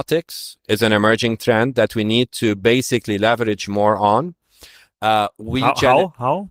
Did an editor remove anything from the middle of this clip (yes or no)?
no